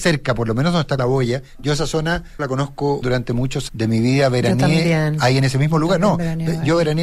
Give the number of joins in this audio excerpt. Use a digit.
4